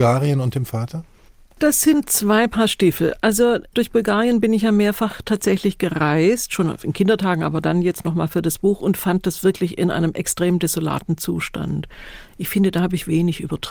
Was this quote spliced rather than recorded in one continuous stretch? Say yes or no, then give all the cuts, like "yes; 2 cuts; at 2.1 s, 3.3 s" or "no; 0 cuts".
no; 0 cuts